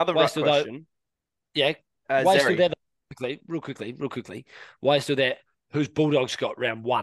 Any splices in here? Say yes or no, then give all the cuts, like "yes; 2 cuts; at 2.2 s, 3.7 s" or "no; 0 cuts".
no; 0 cuts